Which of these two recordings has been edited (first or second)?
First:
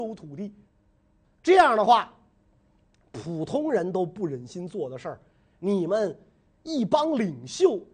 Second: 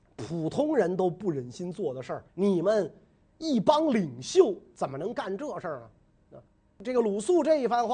second